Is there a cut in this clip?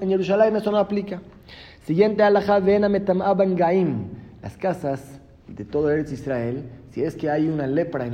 no; 0 cuts

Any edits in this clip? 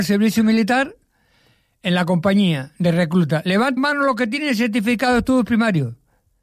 yes; 1 cut; at 3.8 s

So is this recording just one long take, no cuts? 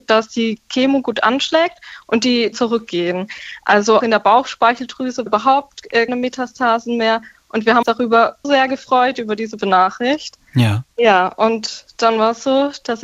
no; 7 cuts; at 2.5 s, 4.0 s, 5.3 s, 6.1 s, 7.8 s, 8.4 s, 9.6 s

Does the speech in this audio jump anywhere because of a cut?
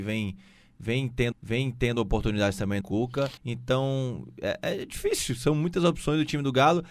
yes; 3 cuts; at 1.3 s, 2.8 s, 3.4 s

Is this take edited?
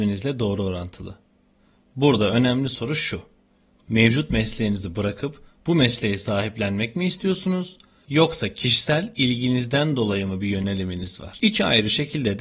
no; 0 cuts

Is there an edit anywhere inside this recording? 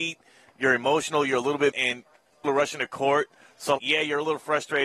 yes; 3 cuts; at 1.7 s, 2.4 s, 3.8 s

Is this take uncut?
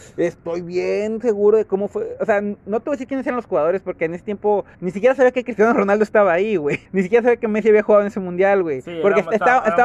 no; 2 cuts; at 4.7 s, 6.9 s

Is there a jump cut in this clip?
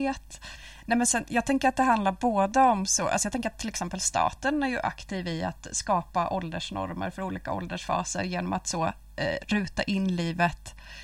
no; 0 cuts

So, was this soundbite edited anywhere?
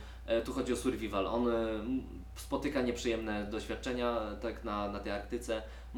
no; 0 cuts

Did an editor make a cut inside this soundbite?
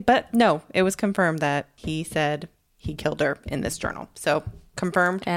no; 0 cuts

